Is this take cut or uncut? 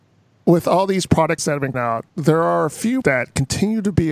cut